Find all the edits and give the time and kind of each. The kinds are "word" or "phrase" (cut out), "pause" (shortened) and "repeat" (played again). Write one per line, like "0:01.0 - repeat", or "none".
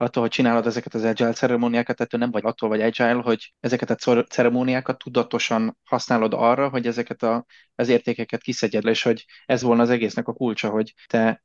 0:02.4 - word
0:08.8 - word
0:09.6 - word